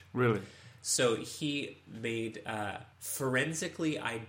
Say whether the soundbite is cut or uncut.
cut